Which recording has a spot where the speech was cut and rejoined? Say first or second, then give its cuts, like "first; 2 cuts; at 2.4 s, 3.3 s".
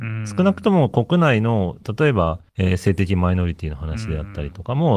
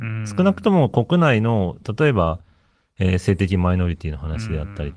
first; 1 cut; at 2.5 s